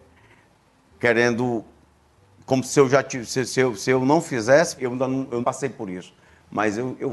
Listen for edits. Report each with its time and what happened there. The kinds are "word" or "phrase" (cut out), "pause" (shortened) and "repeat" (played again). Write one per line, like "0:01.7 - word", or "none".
0:04.8 - word
0:05.4 - word